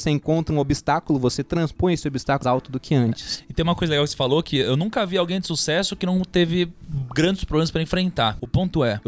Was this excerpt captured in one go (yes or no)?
no